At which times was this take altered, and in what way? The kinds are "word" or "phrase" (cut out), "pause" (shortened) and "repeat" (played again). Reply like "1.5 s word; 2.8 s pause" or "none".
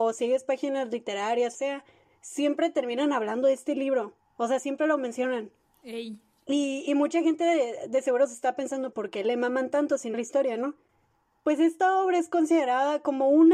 1.5 s phrase; 8.9 s word; 10.1 s phrase